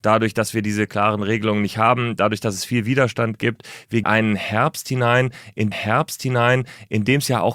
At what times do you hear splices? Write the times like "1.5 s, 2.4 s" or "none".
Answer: 4.0 s, 5.7 s